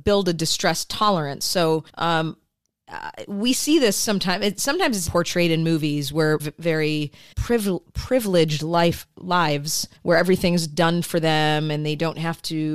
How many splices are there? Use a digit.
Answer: 5